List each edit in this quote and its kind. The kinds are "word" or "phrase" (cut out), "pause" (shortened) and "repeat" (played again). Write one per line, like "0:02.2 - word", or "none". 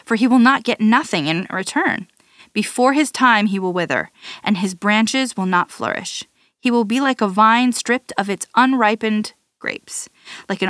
none

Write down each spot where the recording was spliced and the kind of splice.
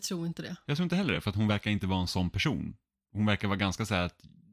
none

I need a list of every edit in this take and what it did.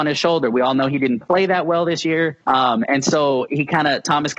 0:02.4 - pause

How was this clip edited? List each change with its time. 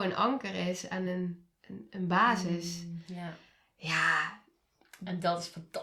none

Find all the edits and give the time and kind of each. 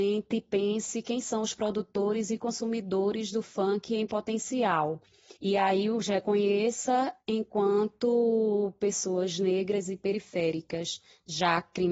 0:05.4 - pause

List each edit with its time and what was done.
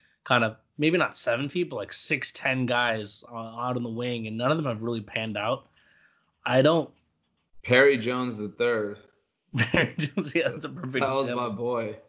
none

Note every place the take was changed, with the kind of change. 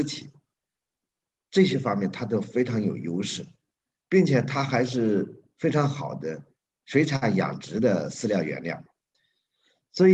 none

